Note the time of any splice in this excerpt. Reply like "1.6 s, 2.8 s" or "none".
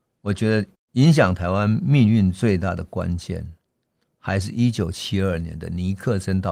none